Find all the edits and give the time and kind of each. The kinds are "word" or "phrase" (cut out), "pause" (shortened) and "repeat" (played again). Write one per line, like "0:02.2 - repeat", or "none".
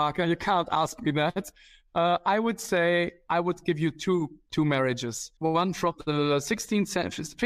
0:05.4 - pause